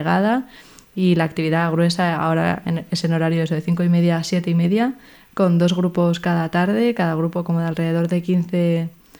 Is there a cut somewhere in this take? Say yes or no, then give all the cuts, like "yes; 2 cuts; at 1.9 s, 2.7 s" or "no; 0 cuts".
no; 0 cuts